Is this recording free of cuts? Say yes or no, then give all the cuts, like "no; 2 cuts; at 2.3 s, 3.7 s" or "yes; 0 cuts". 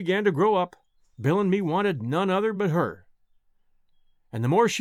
yes; 0 cuts